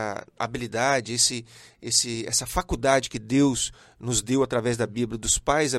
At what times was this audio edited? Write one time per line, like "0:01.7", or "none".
none

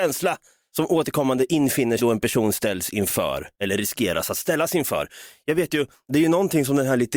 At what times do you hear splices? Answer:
0:02.0
0:03.5

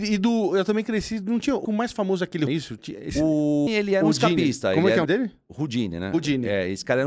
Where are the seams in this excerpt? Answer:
0:01.6
0:02.5
0:03.7
0:05.0

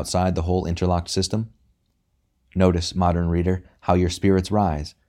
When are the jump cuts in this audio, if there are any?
none

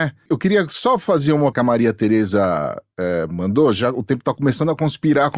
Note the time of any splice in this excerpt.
0:01.5

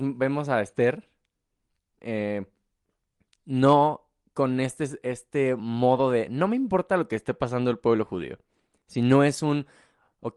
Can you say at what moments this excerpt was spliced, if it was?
none

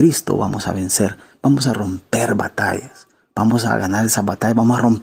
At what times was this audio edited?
none

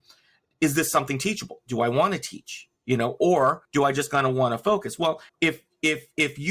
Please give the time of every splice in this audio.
0:02.8
0:03.6
0:05.3

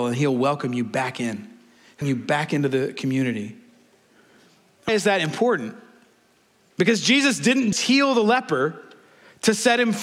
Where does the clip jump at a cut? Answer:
0:02.0
0:04.9
0:07.7

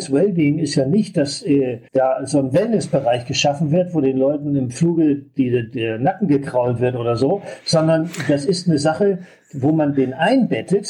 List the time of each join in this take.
0:01.9

